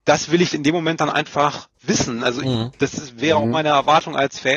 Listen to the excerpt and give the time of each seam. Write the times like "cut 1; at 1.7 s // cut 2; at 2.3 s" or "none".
cut 1; at 1.7 s